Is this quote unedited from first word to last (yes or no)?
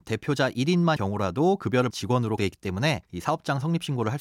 no